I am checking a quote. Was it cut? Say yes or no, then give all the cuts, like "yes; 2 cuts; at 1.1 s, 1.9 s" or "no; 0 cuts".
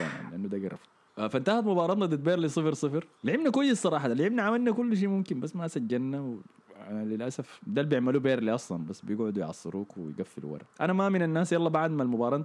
yes; 2 cuts; at 3.2 s, 10.7 s